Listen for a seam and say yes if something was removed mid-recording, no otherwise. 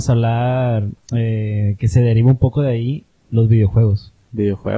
no